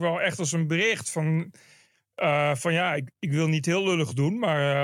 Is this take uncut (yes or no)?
yes